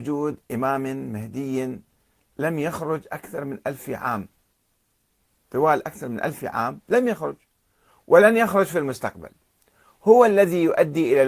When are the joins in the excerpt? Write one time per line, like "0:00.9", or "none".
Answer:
none